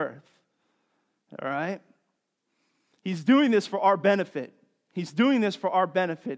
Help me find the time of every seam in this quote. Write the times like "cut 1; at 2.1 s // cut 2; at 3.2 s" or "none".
none